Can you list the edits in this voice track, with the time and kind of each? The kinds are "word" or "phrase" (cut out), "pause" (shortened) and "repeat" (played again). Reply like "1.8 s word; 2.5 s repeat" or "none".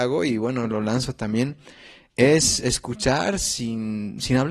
none